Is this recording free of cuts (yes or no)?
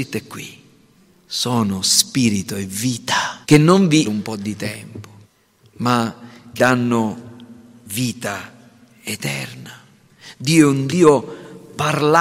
no